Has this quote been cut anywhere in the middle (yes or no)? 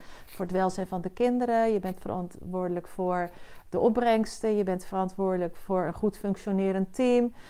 no